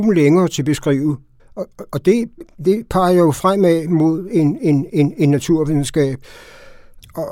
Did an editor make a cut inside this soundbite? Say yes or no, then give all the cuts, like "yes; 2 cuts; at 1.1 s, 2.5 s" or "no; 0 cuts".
yes; 1 cut; at 1.4 s